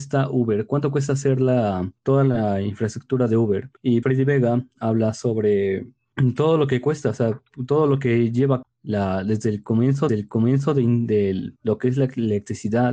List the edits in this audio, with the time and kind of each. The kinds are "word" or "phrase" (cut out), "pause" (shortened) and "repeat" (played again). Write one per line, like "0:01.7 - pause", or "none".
0:04.0 - word
0:08.6 - word
0:10.1 - repeat
0:11.6 - pause